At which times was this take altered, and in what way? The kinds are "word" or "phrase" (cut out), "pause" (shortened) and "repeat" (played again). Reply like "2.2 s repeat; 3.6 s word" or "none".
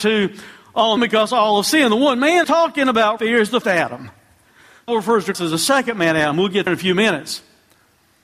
1.0 s word; 2.4 s word; 3.2 s word; 3.6 s word; 4.9 s word; 5.3 s word; 6.7 s word